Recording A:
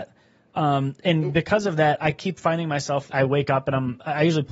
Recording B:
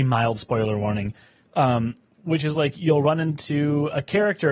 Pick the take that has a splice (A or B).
A